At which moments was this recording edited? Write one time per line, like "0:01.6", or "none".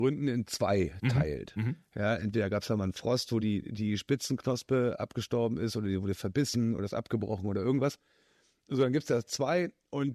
none